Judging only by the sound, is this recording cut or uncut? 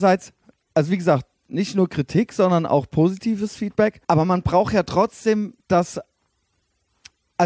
cut